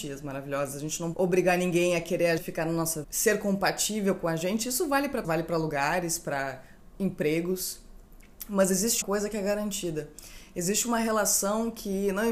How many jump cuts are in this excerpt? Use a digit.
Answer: 5